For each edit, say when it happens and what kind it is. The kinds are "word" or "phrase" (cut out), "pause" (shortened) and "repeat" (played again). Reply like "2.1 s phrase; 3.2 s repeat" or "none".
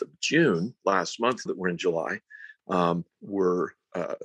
1.5 s word; 3.1 s pause

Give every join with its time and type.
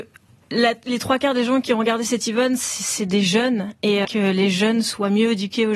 4.0 s phrase

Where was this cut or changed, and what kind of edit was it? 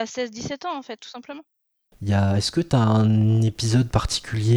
none

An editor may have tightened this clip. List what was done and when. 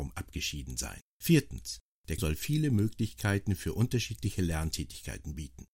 1.1 s pause; 2.2 s word

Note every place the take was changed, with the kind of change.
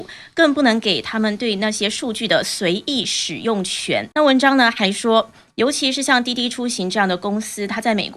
4.1 s pause

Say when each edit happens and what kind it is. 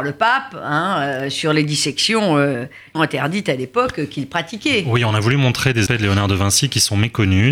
2.9 s word; 5.9 s word

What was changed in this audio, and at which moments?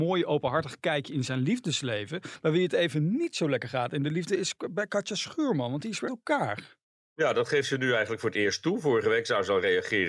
6.1 s word

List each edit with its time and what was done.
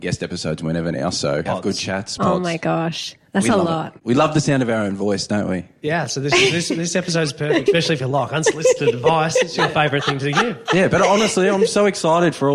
1.5 s phrase; 2.2 s word

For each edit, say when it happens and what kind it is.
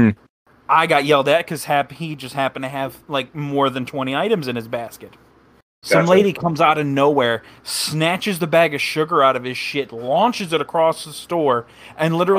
none

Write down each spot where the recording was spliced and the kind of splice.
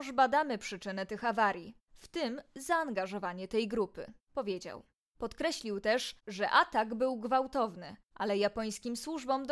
none

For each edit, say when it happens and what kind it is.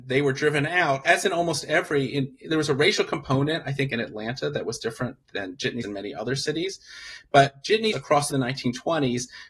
5.2 s pause; 5.8 s word; 7.9 s word; 8.3 s phrase

